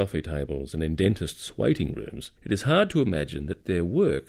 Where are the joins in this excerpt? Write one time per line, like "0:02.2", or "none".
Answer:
0:02.4

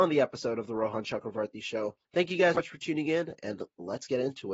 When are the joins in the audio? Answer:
0:02.0
0:02.5

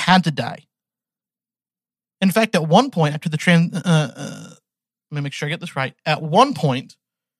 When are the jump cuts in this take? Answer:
0:04.9

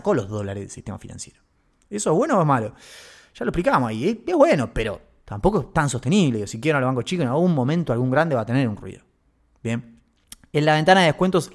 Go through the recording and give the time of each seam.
none

